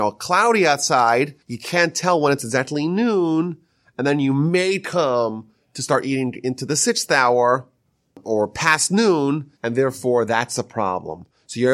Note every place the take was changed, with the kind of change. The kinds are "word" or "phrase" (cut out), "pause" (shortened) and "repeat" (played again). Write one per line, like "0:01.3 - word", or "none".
0:01.4 - pause
0:09.6 - pause